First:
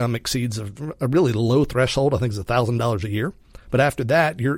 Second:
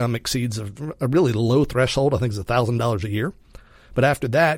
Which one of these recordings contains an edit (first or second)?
first